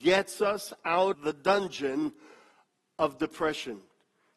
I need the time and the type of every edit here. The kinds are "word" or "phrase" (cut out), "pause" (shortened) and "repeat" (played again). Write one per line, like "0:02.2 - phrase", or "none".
0:01.1 - word

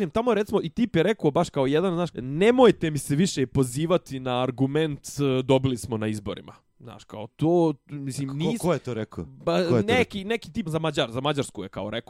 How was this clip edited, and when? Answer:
0:02.1 - word
0:07.3 - word
0:10.6 - word

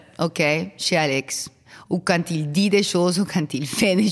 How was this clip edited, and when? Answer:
none

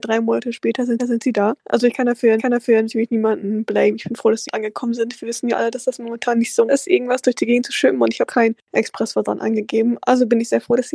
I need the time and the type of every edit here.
0:01.0 - repeat
0:02.4 - repeat
0:04.5 - word
0:06.7 - word
0:08.3 - word

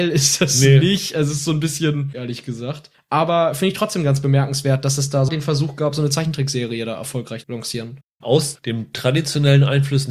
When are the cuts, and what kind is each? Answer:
0:02.1 - word
0:05.3 - word
0:07.4 - word

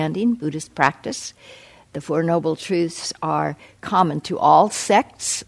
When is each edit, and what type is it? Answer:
none

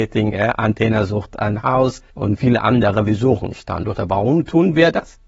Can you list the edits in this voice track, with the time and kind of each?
0:02.1 - pause

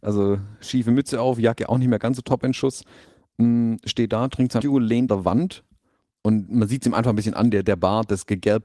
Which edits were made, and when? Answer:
0:04.6 - word
0:05.1 - word

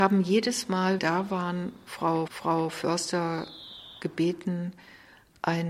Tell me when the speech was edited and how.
0:01.0 - phrase
0:02.3 - repeat

